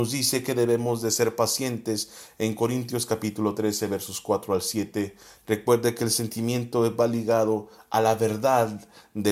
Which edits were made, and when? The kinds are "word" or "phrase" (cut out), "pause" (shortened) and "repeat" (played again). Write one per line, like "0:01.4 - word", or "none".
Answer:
none